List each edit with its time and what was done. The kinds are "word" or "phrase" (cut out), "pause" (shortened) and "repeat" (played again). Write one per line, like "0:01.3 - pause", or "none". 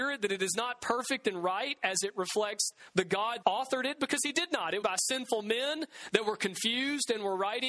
0:03.4 - word
0:04.8 - phrase